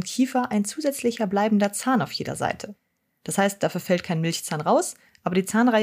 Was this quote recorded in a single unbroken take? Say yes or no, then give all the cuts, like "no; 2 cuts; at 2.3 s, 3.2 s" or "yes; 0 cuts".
yes; 0 cuts